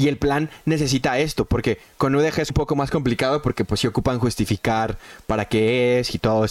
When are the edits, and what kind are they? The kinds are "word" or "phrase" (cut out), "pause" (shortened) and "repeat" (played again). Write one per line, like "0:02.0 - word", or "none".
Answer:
0:02.5 - word